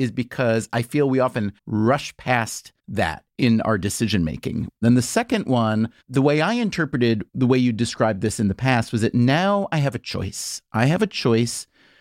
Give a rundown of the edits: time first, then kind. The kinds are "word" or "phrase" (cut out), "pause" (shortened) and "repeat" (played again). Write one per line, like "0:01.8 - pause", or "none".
0:01.6 - pause
0:02.8 - pause
0:04.8 - pause
0:06.0 - pause